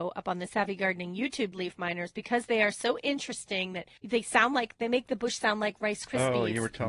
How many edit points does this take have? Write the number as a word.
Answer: two